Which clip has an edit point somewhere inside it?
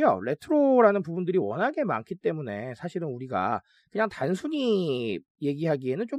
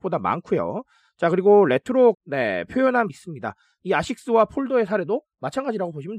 second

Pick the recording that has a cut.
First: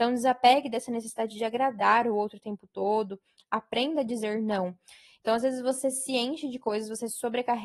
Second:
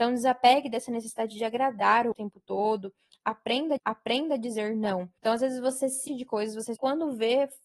second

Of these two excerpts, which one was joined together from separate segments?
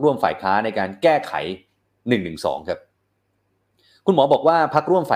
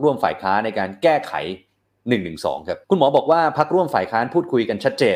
second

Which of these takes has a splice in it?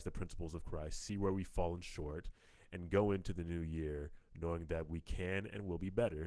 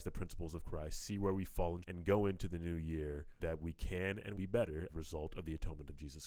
second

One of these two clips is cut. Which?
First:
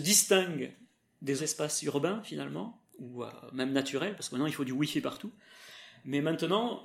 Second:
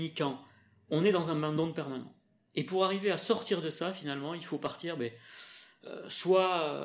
first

